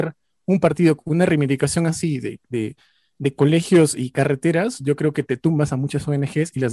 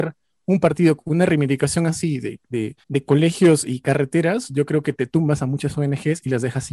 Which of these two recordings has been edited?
second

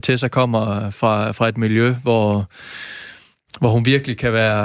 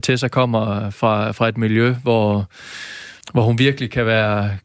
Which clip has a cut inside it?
second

